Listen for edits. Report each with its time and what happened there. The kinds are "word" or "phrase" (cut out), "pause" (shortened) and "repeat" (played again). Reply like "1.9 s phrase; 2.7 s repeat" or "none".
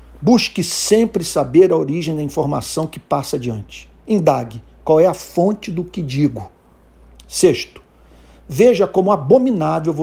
none